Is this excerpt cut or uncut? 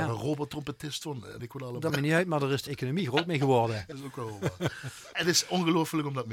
cut